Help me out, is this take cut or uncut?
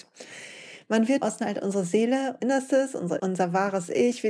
cut